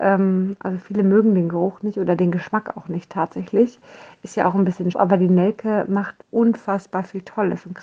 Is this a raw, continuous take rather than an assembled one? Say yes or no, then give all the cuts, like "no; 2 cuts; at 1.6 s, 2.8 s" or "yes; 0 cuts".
no; 2 cuts; at 4.9 s, 6.2 s